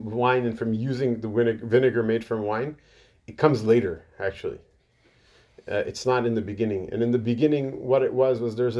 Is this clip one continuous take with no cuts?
yes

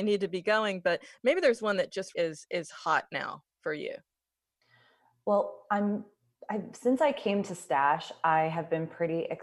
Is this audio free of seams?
no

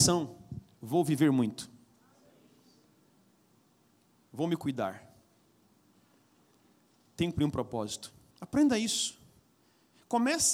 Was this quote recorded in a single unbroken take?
no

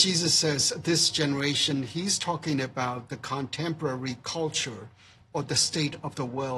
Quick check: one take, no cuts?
yes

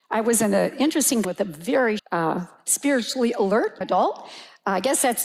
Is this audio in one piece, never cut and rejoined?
no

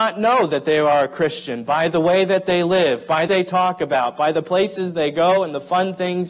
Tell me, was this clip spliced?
yes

